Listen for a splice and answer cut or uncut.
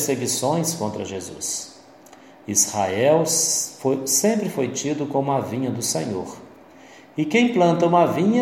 uncut